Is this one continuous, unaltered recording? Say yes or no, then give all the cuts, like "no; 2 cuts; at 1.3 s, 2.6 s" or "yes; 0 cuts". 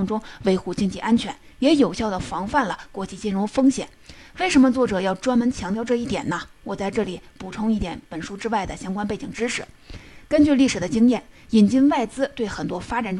yes; 0 cuts